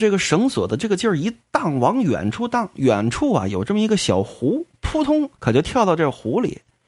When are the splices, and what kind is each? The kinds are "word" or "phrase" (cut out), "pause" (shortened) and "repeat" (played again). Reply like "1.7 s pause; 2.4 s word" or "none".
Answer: 5.3 s pause